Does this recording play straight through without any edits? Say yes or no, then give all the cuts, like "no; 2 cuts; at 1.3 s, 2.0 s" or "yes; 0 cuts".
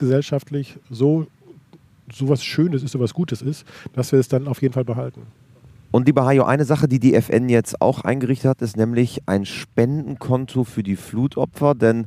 yes; 0 cuts